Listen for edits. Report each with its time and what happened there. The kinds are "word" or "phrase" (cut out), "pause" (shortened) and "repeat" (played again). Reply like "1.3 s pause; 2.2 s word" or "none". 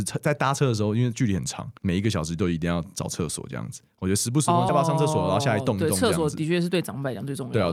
1.8 s pause; 4.7 s phrase